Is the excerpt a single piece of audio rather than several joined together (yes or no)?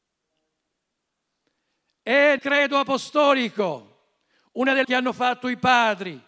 no